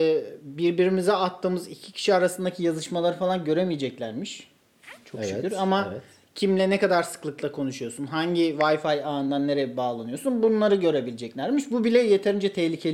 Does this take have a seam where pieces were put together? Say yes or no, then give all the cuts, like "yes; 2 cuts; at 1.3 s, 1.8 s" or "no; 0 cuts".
no; 0 cuts